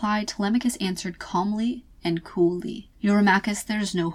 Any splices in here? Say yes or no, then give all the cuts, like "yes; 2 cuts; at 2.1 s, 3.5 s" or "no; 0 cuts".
yes; 1 cut; at 2.9 s